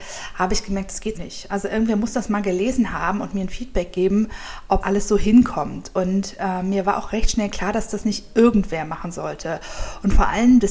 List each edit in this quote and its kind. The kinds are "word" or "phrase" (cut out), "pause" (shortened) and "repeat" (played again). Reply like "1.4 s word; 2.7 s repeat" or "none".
1.1 s word; 4.8 s word